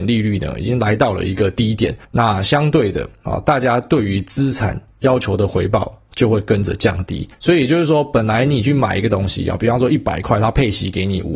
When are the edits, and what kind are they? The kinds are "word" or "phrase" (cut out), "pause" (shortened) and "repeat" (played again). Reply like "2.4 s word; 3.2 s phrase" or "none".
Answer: 2.0 s pause; 7.3 s pause